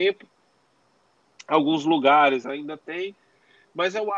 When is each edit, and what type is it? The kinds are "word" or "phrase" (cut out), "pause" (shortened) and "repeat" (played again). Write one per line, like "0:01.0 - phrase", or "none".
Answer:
none